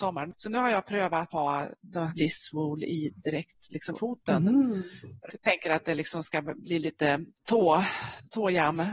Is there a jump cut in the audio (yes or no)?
yes